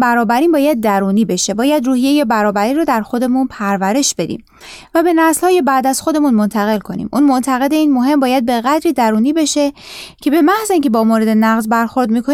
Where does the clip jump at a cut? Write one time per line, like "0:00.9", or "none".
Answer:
none